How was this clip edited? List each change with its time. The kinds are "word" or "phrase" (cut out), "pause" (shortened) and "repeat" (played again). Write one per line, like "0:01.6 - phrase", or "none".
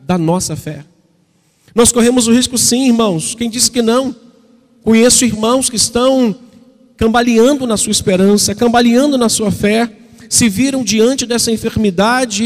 none